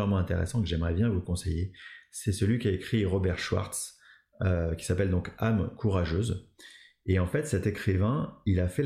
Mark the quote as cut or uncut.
uncut